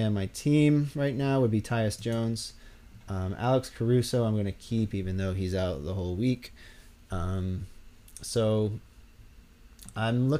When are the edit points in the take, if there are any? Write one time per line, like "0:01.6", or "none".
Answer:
none